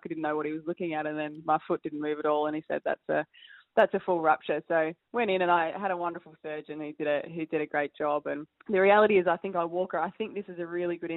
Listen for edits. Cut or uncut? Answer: cut